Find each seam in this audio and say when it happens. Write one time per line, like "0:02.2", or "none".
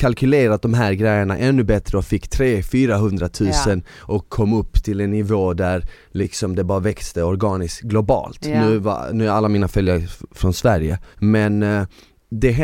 0:11.1